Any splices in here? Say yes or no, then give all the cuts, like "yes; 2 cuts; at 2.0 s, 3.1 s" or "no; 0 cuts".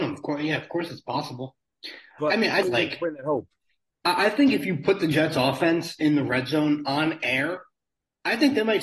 yes; 1 cut; at 2.6 s